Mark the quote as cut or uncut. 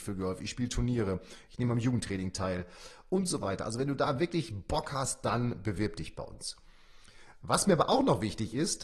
cut